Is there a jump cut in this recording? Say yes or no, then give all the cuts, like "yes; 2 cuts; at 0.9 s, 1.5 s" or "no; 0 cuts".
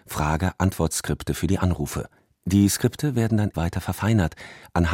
yes; 2 cuts; at 2.2 s, 3.5 s